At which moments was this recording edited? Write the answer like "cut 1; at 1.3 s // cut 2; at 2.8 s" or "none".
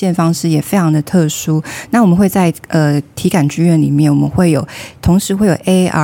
none